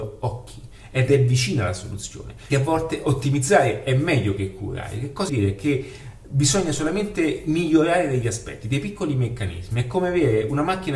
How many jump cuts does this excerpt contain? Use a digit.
2